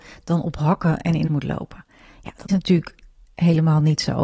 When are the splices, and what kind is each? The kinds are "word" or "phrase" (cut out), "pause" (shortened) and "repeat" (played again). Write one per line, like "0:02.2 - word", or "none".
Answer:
0:01.3 - word
0:02.5 - word

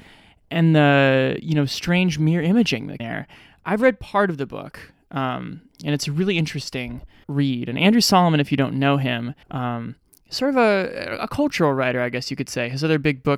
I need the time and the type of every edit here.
0:03.0 - phrase
0:07.2 - word
0:09.4 - pause

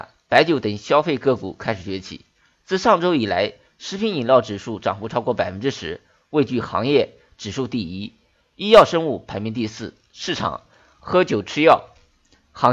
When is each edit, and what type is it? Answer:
none

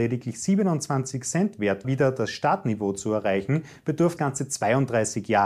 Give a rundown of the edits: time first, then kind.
0:01.8 - word
0:04.2 - word

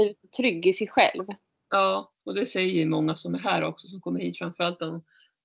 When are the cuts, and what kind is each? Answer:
0:02.2 - pause

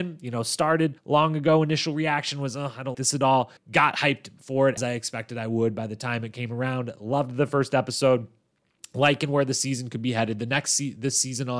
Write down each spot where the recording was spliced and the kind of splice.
0:01.0 - pause
0:02.9 - word
0:03.6 - pause
0:04.8 - word

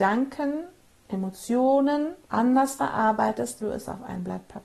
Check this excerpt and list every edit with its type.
0:02.2 - pause
0:03.6 - word

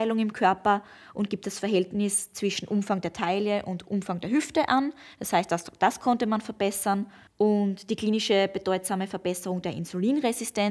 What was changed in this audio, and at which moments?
0:07.3 - pause

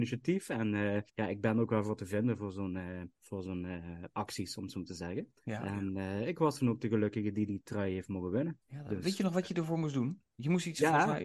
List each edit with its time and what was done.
0:01.1 - pause
0:03.1 - pause
0:05.4 - pause
0:08.6 - pause

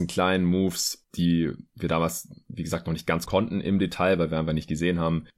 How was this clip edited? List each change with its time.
0:03.3 - phrase

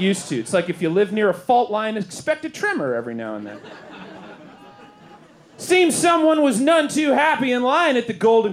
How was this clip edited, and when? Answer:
none

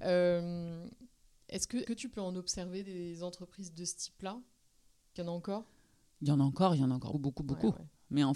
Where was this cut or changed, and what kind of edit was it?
0:01.8 - word
0:05.2 - word
0:07.1 - word

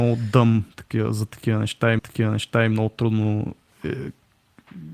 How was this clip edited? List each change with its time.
0:02.0 - repeat

